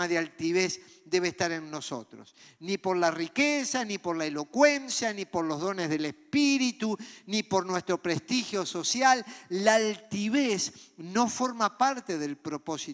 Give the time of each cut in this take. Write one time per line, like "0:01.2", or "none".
none

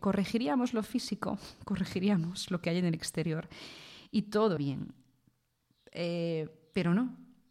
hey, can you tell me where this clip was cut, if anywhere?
0:04.6

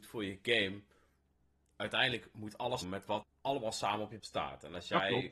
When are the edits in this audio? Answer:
0:02.8
0:03.2
0:04.2

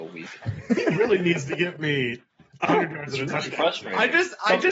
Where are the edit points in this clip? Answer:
none

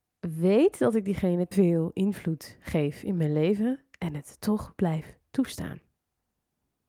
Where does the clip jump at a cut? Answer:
0:01.5

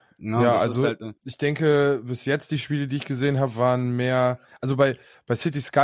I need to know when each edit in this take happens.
0:01.2

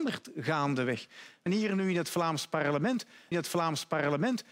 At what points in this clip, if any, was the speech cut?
0:01.5
0:03.3

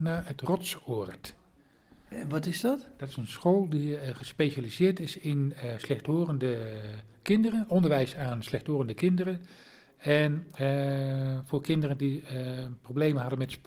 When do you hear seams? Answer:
none

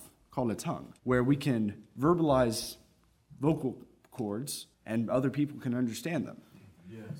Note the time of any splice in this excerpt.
0:01.0
0:04.7

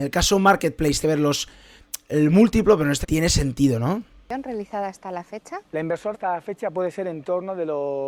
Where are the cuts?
0:01.0
0:03.0
0:04.1
0:05.6
0:06.1

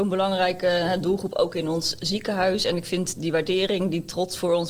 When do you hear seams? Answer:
none

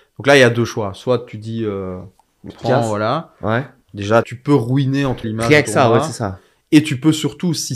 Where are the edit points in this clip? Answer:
0:02.5
0:04.2
0:05.2
0:05.6

